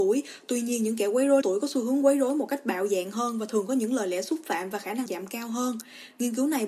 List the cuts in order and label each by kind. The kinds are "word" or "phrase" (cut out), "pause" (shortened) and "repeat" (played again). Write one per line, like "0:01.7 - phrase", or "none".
0:01.4 - word
0:05.1 - word